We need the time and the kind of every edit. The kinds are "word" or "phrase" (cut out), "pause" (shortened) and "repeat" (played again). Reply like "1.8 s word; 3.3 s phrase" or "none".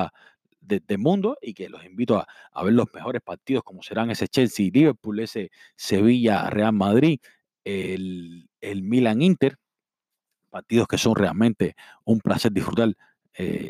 none

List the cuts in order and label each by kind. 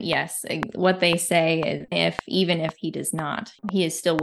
1.9 s word

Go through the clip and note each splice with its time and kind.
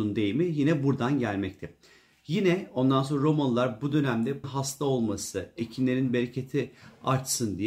4.4 s word

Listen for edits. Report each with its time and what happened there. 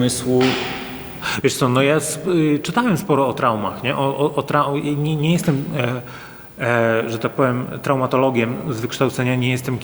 none

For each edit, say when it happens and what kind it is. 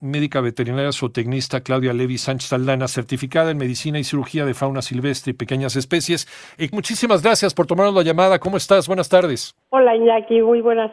6.7 s word

